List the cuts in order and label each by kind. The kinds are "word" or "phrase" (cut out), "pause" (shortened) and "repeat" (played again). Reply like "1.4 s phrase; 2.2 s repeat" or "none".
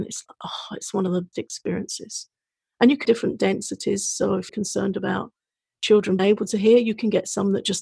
1.3 s word; 3.0 s word; 4.5 s word; 6.2 s word